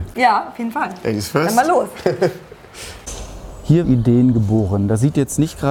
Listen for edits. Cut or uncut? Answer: cut